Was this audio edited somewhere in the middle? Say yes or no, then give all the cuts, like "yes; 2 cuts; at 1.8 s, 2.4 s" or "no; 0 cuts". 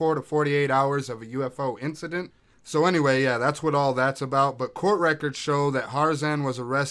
no; 0 cuts